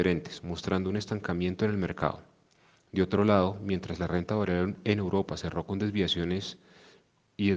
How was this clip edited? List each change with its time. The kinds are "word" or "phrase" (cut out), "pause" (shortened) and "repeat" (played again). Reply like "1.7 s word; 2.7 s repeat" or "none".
none